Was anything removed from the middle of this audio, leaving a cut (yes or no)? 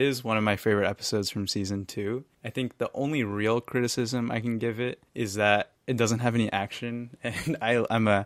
yes